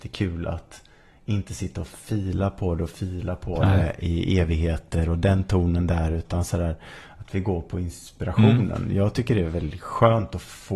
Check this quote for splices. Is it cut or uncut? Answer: uncut